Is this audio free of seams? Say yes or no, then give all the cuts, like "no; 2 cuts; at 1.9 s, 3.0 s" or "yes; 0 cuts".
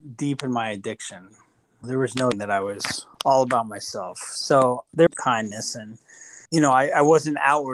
no; 5 cuts; at 1.8 s, 2.3 s, 3.1 s, 5.1 s, 6.5 s